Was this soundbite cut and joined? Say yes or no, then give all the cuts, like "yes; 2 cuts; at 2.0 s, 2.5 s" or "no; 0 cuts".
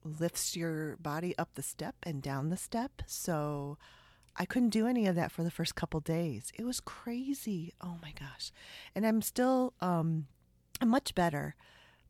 no; 0 cuts